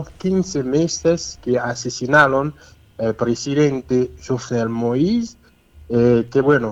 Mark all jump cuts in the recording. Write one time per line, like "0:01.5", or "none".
none